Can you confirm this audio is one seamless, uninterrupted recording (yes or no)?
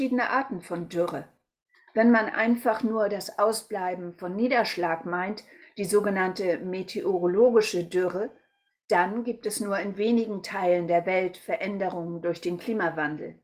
yes